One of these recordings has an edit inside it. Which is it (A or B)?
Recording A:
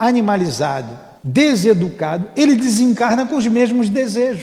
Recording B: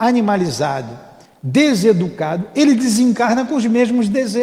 A